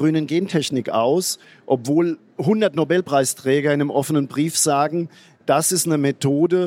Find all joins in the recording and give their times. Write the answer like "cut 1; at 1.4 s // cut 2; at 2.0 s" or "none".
none